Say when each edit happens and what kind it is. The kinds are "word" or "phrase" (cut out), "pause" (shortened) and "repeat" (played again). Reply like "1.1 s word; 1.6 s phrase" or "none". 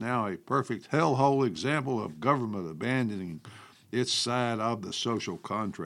none